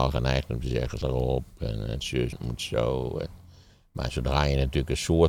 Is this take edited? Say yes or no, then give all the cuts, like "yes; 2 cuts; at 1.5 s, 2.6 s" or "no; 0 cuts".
yes; 3 cuts; at 1.0 s, 2.0 s, 2.3 s